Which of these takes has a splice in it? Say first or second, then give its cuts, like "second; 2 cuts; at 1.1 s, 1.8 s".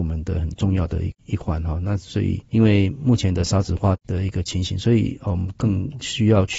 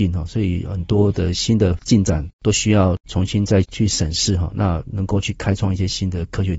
first; 1 cut; at 2.5 s